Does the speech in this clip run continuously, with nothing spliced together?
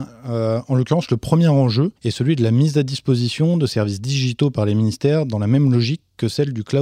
no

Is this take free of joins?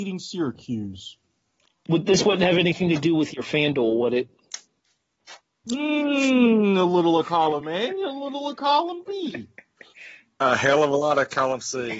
yes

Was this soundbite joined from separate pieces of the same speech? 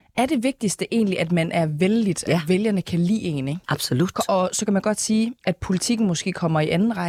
yes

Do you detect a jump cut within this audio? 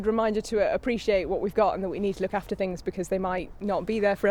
no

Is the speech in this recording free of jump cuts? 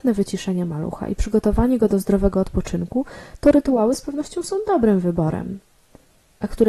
yes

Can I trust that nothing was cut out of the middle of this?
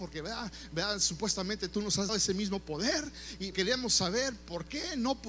no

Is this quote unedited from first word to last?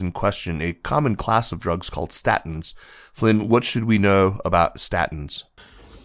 yes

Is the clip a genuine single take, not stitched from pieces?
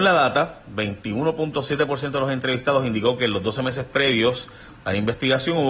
yes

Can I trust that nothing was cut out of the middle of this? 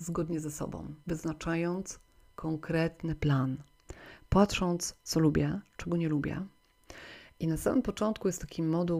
no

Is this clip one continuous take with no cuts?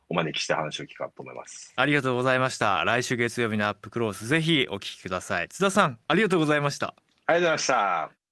yes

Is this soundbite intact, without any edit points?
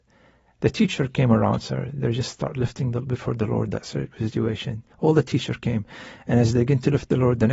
no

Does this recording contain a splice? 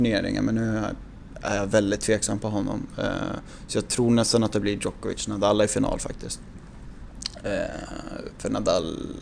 no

